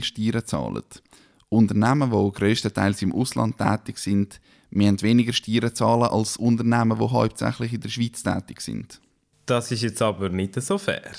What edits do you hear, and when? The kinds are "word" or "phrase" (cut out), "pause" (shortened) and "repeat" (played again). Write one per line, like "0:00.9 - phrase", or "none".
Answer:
none